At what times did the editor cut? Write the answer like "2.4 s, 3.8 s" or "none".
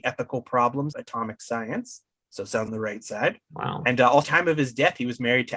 0.9 s, 2.7 s, 3.4 s, 4.2 s